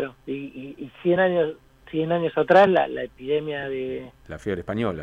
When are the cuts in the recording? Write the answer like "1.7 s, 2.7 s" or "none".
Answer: none